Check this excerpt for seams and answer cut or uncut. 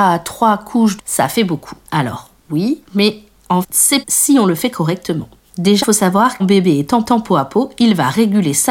cut